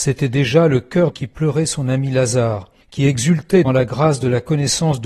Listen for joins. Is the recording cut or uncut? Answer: cut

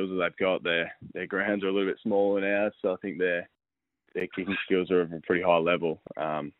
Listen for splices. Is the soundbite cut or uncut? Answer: uncut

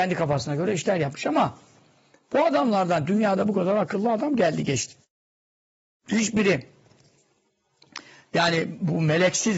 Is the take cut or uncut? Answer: uncut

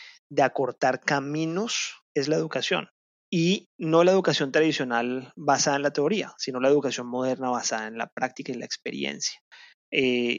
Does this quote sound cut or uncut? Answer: cut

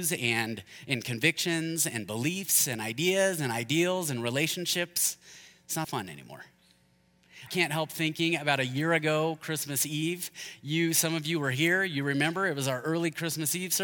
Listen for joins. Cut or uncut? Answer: cut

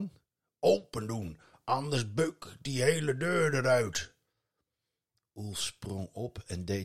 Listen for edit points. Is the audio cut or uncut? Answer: uncut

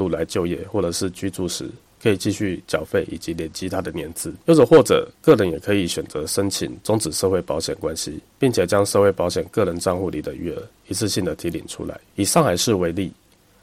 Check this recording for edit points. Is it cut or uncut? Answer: cut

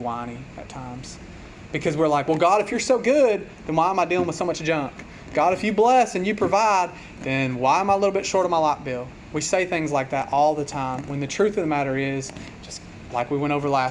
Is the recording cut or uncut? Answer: uncut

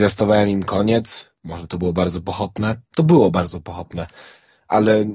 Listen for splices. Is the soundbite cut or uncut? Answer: uncut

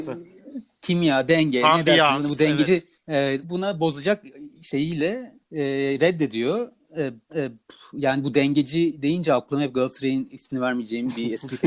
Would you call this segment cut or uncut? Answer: cut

